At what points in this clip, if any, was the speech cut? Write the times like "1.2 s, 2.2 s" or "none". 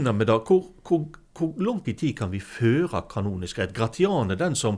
1.8 s